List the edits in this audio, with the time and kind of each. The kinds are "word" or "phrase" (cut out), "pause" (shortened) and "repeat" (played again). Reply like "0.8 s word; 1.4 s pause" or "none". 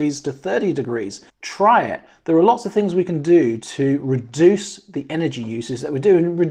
1.3 s pause